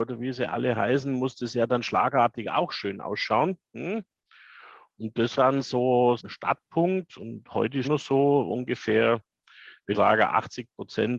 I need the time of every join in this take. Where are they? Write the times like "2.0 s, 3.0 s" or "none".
5.3 s, 6.2 s, 7.8 s, 9.9 s